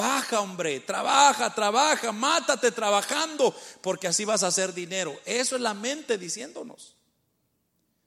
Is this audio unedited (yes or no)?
yes